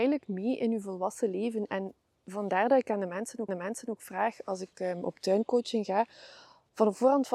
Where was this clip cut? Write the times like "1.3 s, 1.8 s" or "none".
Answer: 3.5 s

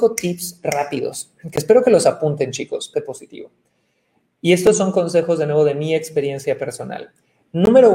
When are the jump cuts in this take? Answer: 2.9 s

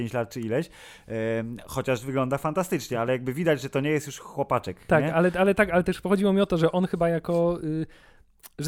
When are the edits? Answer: none

